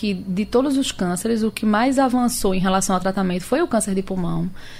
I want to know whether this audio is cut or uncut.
uncut